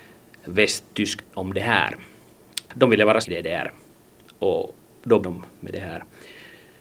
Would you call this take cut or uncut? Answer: cut